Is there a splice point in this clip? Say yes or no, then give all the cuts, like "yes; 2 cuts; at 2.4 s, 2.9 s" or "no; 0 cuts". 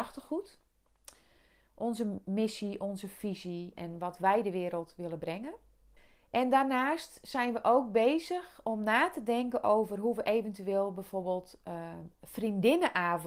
yes; 2 cuts; at 3.7 s, 6.0 s